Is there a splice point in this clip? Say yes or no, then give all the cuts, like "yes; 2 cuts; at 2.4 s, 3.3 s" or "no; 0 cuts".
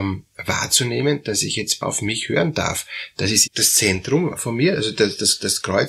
yes; 3 cuts; at 1.8 s, 3.5 s, 4.4 s